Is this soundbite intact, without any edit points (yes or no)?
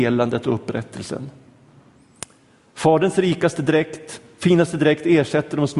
yes